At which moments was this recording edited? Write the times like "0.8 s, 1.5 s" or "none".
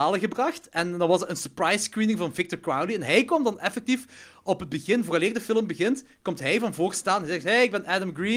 none

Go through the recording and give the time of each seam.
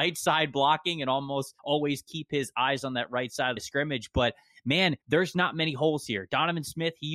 1.6 s, 3.6 s, 5.0 s

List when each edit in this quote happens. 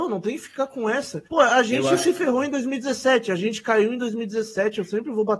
1.3 s

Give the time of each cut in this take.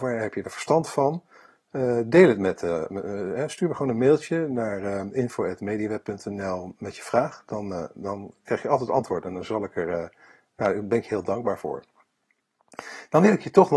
none

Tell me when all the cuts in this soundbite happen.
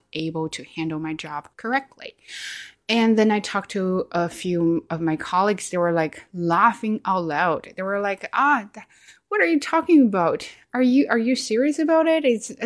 1.5 s

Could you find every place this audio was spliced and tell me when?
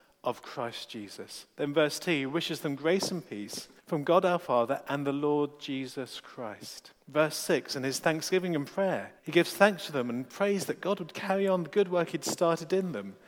3.8 s, 7.0 s, 9.2 s

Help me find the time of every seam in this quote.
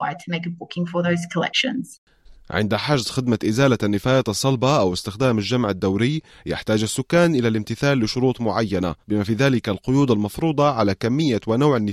9.0 s

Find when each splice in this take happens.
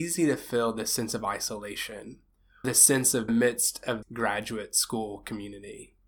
2.6 s, 3.3 s, 4.0 s

